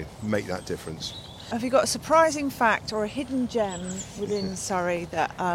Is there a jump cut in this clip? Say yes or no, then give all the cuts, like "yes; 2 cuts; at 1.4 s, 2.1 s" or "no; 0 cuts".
no; 0 cuts